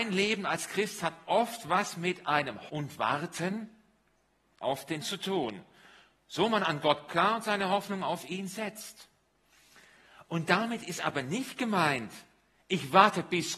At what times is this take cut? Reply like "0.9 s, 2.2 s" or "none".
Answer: 2.7 s, 5.0 s, 7.1 s